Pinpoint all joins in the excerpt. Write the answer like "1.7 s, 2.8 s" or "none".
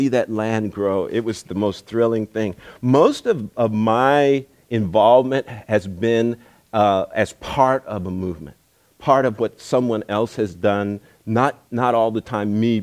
none